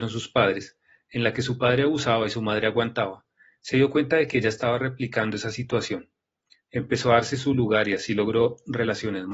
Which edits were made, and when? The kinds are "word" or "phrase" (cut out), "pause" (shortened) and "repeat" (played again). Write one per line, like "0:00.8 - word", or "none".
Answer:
none